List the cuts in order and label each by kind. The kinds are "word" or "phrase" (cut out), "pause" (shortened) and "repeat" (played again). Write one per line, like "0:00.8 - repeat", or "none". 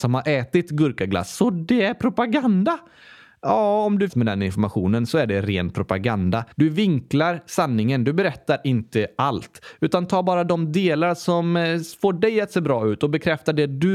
0:04.1 - phrase
0:06.5 - pause